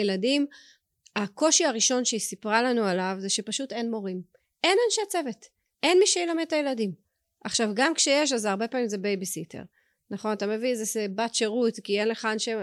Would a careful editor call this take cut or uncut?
uncut